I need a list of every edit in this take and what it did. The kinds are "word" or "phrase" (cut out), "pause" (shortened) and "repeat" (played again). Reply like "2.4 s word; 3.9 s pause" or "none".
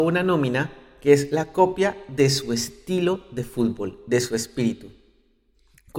none